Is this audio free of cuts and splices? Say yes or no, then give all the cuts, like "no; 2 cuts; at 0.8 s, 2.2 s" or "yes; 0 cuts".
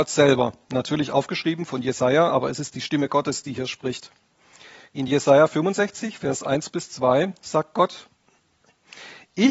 yes; 0 cuts